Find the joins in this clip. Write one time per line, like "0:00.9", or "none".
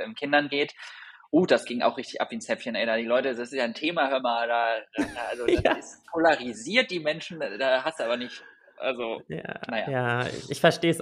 none